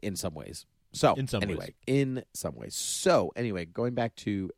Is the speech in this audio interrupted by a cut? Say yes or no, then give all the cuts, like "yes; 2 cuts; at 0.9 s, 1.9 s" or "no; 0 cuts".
yes; 1 cut; at 1.8 s